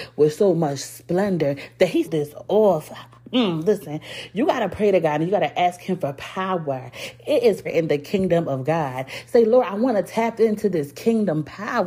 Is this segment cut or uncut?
cut